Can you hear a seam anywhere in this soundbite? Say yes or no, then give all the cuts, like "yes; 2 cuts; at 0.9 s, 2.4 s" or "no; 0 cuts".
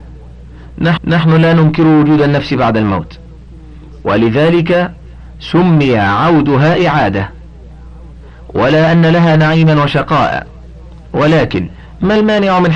yes; 1 cut; at 1.0 s